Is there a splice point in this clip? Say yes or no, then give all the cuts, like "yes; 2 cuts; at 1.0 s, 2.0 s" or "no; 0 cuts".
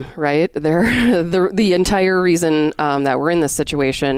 no; 0 cuts